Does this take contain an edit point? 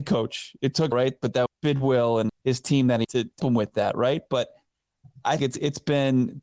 yes; 6 cuts; at 0.9 s, 1.5 s, 2.3 s, 3.0 s, 3.4 s, 5.4 s

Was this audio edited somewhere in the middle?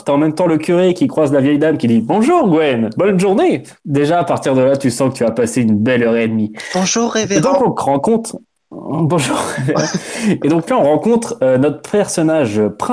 no; 0 cuts

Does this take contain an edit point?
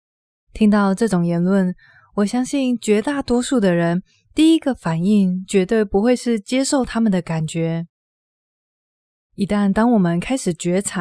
no; 0 cuts

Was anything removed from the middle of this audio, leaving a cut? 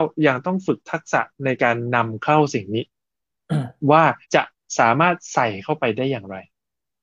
yes; 1 cut; at 4.2 s

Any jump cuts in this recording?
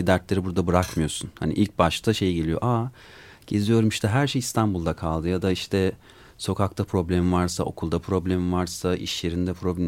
no; 0 cuts

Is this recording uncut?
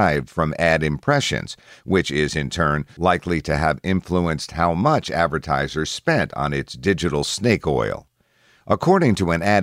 yes; 0 cuts

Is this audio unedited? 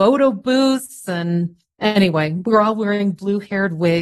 yes; 0 cuts

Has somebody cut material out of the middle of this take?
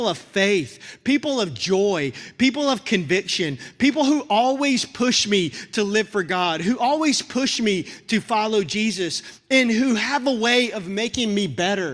no; 0 cuts

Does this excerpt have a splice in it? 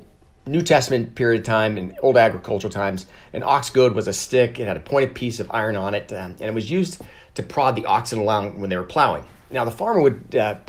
no; 0 cuts

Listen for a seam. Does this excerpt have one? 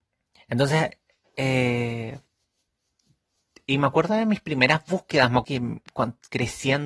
yes; 1 cut; at 5.4 s

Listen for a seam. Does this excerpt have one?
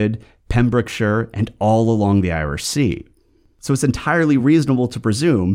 no; 0 cuts

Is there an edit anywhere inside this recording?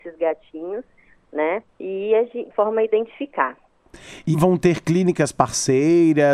yes; 3 cuts; at 1.7 s, 2.5 s, 4.3 s

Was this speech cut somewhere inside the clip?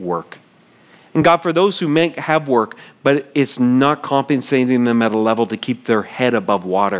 no; 0 cuts

